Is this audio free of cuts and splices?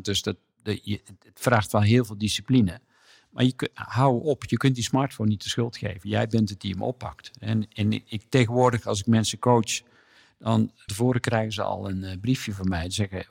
no; 1 cut; at 10.9 s

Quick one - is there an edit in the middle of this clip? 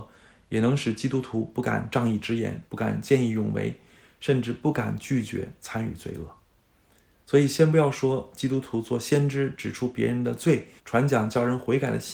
yes; 2 cuts; at 2.7 s, 10.8 s

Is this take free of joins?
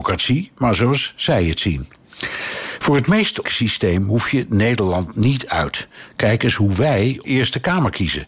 no; 2 cuts; at 3.4 s, 7.2 s

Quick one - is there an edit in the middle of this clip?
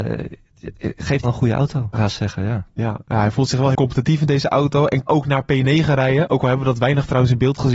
yes; 4 cuts; at 1.2 s, 1.9 s, 3.7 s, 5.1 s

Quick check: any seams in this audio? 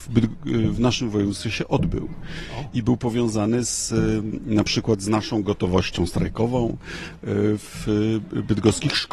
no; 0 cuts

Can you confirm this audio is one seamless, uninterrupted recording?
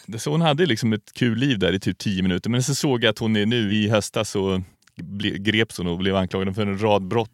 yes; 0 cuts

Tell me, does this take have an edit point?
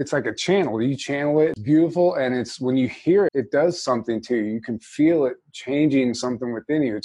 yes; 2 cuts; at 1.6 s, 3.3 s

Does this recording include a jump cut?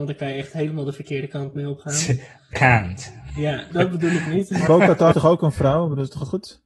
yes; 4 cuts; at 2.5 s, 3.7 s, 4.7 s, 5.1 s

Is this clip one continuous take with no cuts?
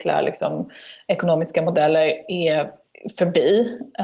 yes; 0 cuts

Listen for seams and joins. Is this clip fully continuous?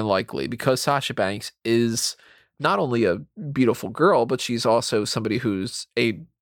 yes; 0 cuts

